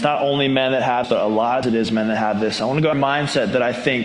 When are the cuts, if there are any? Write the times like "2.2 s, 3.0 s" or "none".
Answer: 1.0 s, 1.6 s, 2.9 s